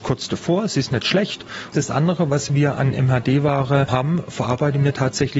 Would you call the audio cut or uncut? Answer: uncut